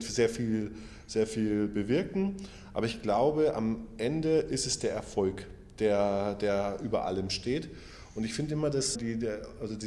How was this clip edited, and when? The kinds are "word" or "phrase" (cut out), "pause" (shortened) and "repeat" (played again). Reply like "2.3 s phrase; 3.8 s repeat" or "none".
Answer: 8.9 s word

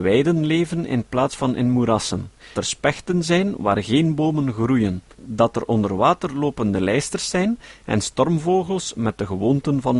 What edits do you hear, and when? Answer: 2.5 s word; 5.1 s pause

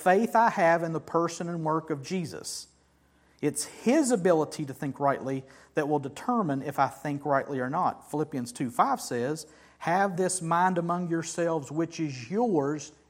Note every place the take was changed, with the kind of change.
none

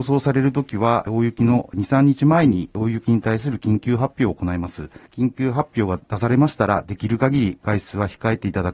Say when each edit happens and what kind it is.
5.1 s pause

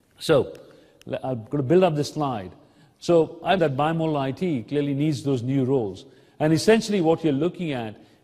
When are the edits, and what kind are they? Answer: 3.6 s word

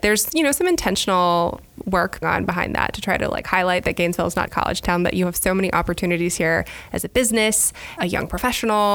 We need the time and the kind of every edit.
2.2 s word; 4.5 s word; 8.0 s word

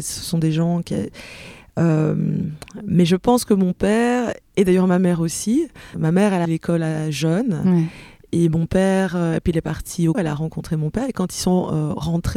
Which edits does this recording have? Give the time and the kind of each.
5.9 s word; 6.4 s word; 10.1 s word

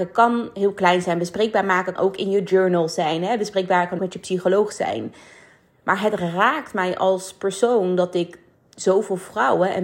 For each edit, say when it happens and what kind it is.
2.0 s word; 4.0 s word

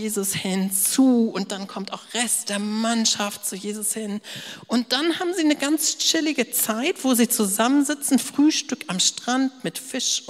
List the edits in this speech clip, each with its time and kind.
none

